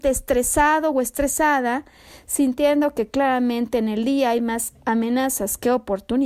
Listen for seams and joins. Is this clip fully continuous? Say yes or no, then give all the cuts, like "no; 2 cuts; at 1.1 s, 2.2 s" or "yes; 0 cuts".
yes; 0 cuts